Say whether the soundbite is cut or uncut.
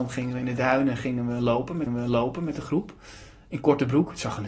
cut